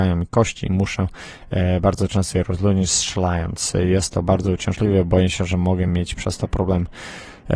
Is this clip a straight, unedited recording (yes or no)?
yes